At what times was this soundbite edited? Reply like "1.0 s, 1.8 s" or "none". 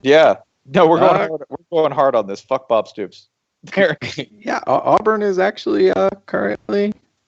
none